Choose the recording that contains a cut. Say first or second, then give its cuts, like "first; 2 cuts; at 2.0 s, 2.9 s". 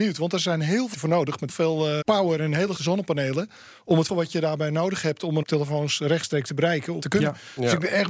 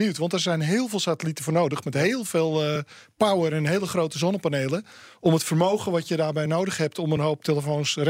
first; 7 cuts; at 0.9 s, 1.5 s, 2.0 s, 2.8 s, 4.1 s, 5.4 s, 7.0 s